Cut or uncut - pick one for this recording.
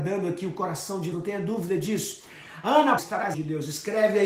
cut